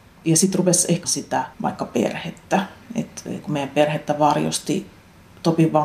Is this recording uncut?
no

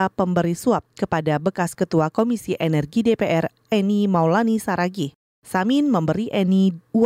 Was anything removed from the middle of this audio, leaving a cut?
no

